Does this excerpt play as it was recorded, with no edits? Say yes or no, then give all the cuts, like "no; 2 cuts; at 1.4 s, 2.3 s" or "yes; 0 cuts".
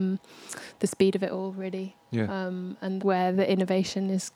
no; 1 cut; at 3.0 s